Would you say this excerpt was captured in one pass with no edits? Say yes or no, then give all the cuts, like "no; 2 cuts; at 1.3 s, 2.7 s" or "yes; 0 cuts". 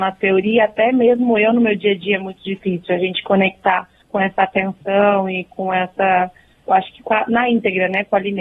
yes; 0 cuts